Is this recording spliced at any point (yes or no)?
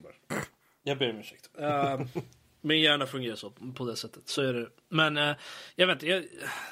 no